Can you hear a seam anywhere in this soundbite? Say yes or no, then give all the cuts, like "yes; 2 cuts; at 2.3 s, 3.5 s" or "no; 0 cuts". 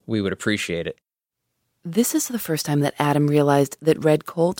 no; 0 cuts